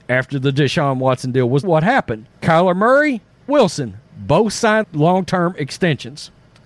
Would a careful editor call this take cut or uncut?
cut